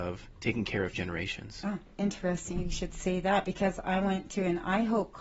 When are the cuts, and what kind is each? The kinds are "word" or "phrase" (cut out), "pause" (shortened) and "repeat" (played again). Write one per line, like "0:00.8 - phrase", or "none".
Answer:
0:00.9 - word